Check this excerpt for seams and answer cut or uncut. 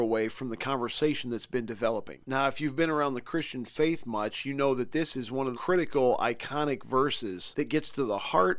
cut